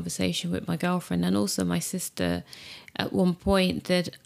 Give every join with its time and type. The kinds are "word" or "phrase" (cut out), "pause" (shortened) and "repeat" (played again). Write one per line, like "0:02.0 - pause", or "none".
none